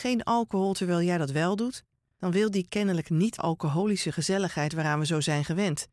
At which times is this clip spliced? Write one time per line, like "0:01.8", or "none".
0:03.4